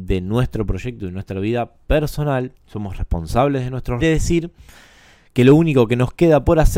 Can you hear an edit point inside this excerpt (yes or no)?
yes